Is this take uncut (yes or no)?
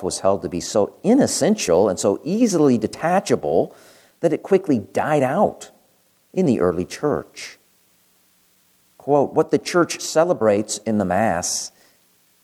yes